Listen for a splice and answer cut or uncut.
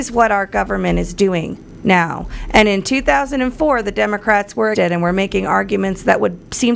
cut